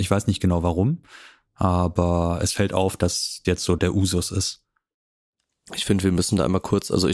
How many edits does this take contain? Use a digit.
2